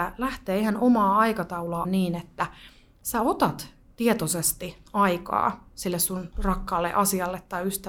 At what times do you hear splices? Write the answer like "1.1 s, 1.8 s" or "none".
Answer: 1.8 s